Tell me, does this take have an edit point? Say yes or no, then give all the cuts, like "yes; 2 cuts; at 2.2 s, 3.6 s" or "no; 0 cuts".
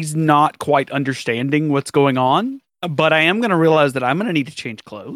no; 0 cuts